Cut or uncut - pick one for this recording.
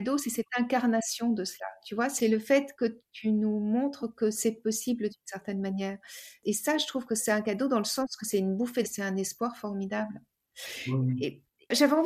cut